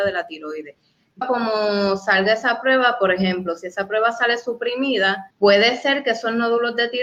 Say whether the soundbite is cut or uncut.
cut